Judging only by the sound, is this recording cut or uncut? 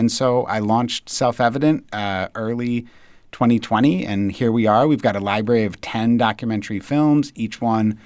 uncut